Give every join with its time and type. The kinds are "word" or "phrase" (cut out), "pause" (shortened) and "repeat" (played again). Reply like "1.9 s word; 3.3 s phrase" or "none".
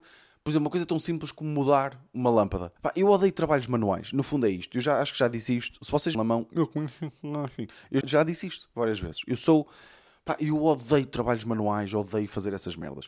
2.8 s pause; 6.1 s phrase; 8.0 s word

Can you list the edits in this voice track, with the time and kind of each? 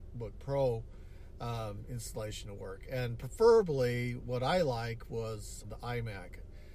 5.6 s word

